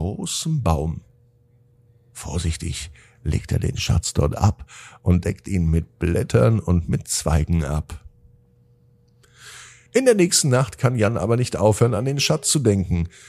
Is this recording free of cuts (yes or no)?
yes